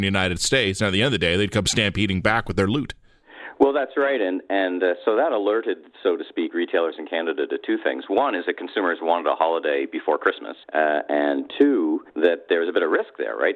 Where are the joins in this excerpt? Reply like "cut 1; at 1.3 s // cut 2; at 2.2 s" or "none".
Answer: cut 1; at 10.6 s // cut 2; at 12.1 s